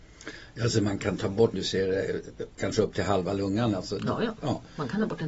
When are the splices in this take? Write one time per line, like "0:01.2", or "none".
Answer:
0:01.5